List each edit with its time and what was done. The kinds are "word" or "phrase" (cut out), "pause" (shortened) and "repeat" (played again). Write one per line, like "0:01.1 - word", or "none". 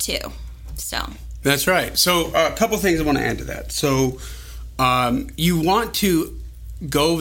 none